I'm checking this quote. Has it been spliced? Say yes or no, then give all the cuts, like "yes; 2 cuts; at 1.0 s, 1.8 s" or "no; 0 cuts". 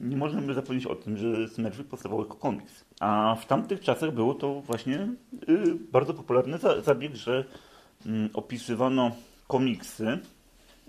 yes; 1 cut; at 2.9 s